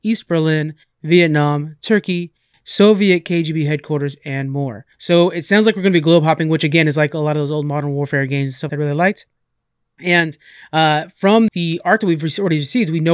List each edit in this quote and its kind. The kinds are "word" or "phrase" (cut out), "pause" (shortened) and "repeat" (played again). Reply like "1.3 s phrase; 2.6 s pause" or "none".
4.9 s pause; 8.7 s phrase; 11.5 s word

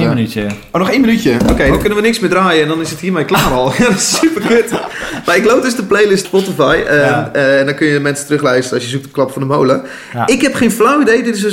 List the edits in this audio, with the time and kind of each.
6.2 s phrase

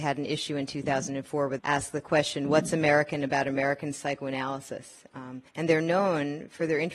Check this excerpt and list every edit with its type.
1.6 s word; 5.5 s pause

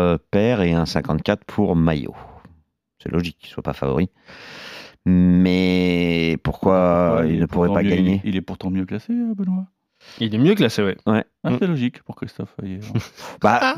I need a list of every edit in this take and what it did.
none

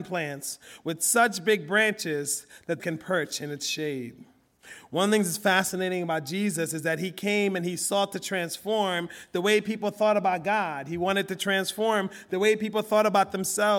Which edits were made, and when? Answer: 2.8 s phrase

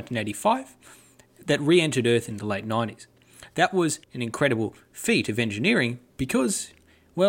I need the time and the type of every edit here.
4.0 s pause

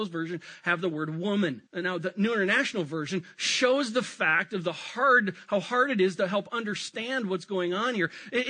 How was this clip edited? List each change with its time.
1.7 s pause

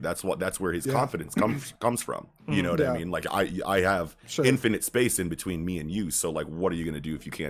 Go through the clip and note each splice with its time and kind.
2.4 s pause

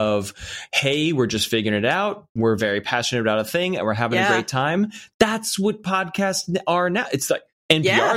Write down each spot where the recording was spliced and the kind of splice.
none

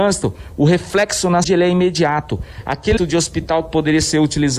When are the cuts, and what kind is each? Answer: 1.4 s word; 3.0 s word

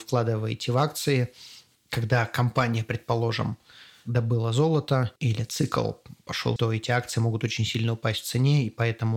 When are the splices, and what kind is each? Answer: 1.8 s word; 5.2 s pause; 6.6 s word

